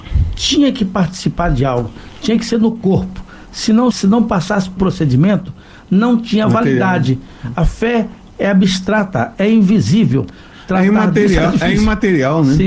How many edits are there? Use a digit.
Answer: 2